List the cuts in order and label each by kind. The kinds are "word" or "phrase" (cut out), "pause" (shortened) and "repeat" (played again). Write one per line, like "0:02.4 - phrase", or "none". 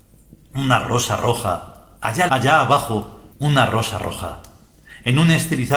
0:02.3 - word
0:03.3 - pause